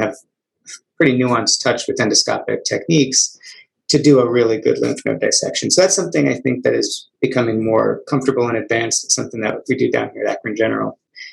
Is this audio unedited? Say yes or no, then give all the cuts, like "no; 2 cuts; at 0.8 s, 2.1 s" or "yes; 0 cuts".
yes; 0 cuts